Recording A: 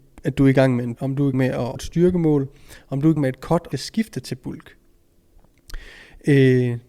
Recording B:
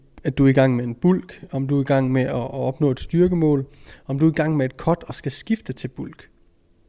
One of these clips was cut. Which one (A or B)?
A